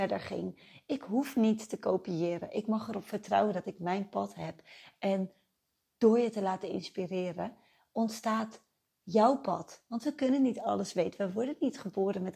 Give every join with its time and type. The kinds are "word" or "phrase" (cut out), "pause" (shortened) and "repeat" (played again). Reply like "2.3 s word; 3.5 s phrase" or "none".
none